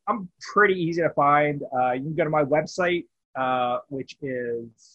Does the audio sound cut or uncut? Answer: uncut